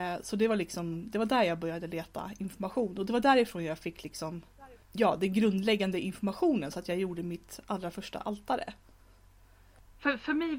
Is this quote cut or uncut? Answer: cut